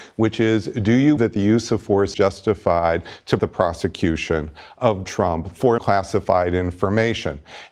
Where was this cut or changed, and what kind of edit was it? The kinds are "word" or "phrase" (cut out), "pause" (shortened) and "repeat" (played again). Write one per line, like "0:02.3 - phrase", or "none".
0:01.2 - word
0:02.1 - word
0:03.4 - word
0:05.0 - word
0:05.8 - word